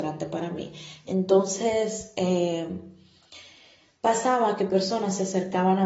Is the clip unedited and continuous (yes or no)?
yes